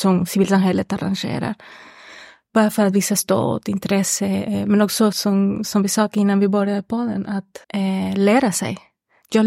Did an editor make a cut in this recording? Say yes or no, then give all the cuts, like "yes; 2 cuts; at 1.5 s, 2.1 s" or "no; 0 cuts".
yes; 2 cuts; at 5.1 s, 7.6 s